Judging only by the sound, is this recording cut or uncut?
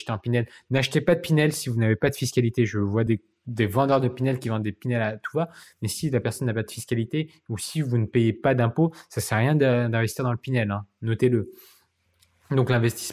uncut